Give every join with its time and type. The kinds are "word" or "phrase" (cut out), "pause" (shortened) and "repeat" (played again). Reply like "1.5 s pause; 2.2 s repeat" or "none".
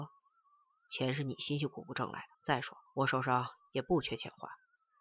2.3 s pause; 2.9 s pause